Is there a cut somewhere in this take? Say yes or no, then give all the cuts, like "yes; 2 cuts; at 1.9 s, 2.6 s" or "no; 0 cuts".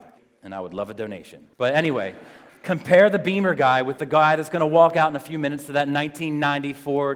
yes; 2 cuts; at 1.5 s, 2.5 s